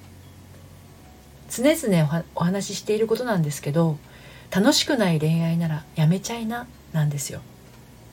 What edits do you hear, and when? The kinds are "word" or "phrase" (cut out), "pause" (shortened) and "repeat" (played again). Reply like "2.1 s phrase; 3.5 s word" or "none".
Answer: 4.5 s pause; 5.9 s pause